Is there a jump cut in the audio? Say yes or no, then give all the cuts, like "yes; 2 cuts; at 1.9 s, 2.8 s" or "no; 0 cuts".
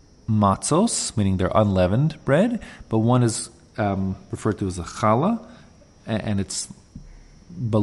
no; 0 cuts